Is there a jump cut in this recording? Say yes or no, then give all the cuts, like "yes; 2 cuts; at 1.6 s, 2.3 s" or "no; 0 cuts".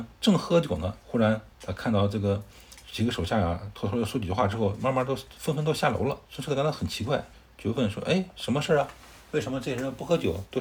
yes; 4 cuts; at 1.0 s, 1.5 s, 6.2 s, 7.3 s